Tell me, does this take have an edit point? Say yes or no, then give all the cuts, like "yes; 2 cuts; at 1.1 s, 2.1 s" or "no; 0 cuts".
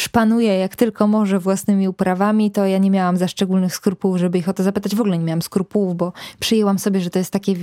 no; 0 cuts